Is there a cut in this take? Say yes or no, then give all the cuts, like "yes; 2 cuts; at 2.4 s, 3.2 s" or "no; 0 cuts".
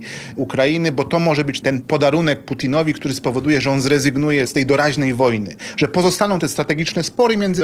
no; 0 cuts